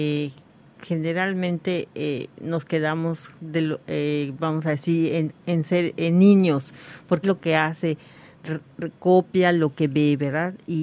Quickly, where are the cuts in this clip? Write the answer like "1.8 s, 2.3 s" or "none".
3.4 s, 5.4 s, 7.2 s

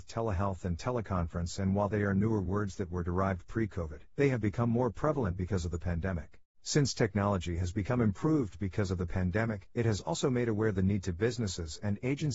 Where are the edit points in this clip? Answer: 4.1 s, 6.4 s, 9.7 s

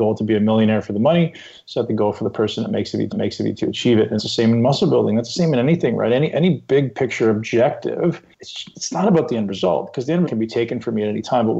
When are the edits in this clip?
3.1 s, 4.2 s, 8.3 s, 10.3 s

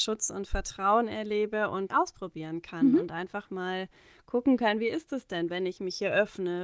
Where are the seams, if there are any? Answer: 1.9 s

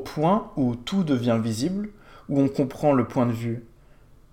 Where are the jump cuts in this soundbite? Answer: none

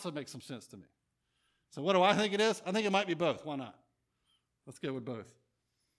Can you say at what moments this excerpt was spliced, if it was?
none

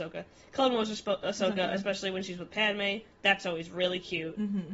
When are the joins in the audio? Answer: none

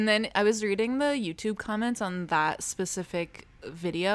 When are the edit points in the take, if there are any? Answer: none

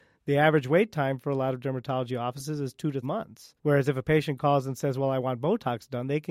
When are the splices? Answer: 3.0 s, 3.6 s

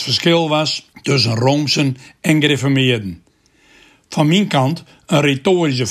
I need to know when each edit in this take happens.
0.9 s

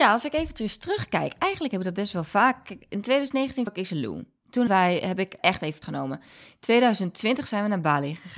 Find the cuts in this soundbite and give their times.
3.7 s, 4.7 s, 5.4 s, 5.8 s

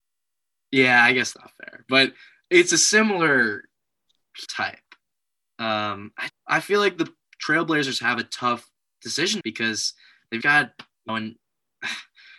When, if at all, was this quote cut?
1.3 s, 4.5 s, 6.3 s, 9.4 s, 10.4 s, 11.1 s

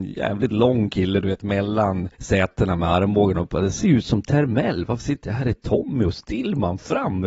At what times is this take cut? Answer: 2.1 s

